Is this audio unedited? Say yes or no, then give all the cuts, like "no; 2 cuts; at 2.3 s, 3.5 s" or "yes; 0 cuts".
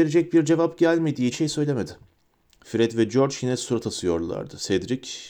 no; 1 cut; at 1.3 s